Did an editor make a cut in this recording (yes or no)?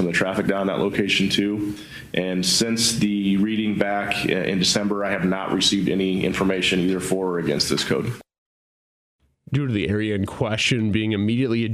no